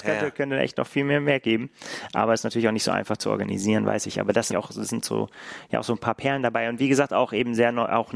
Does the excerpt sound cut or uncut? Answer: cut